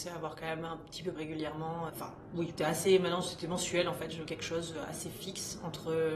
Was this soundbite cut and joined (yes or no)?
yes